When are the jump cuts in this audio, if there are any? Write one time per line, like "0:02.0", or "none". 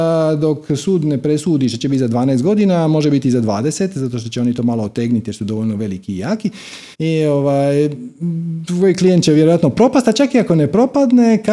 0:06.9